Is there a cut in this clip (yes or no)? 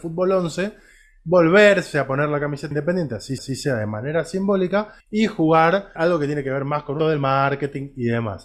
yes